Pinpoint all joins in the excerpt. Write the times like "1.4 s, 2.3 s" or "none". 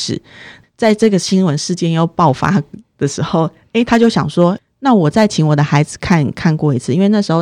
none